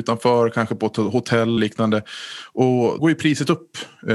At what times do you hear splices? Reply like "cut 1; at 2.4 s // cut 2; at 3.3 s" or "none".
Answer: cut 1; at 1.6 s // cut 2; at 3.0 s